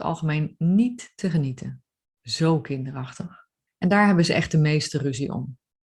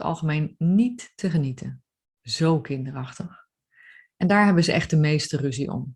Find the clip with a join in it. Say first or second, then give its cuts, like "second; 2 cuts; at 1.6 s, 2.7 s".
first; 1 cut; at 3.7 s